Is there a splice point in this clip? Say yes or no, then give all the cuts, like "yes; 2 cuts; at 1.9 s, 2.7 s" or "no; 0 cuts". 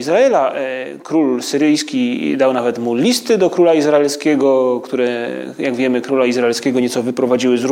no; 0 cuts